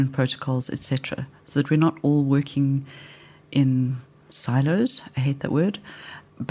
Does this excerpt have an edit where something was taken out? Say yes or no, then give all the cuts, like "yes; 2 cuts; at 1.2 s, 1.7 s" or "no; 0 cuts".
no; 0 cuts